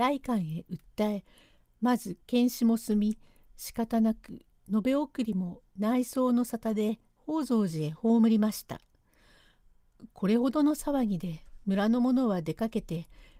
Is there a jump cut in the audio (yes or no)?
no